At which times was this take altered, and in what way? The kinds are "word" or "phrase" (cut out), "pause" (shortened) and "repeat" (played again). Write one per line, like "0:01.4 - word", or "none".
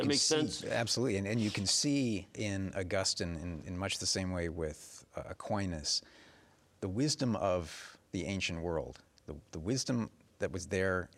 0:02.3 - word